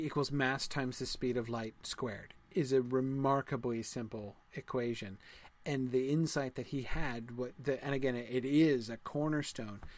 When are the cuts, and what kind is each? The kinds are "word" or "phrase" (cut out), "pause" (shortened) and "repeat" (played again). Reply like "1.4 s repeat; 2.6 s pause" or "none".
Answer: none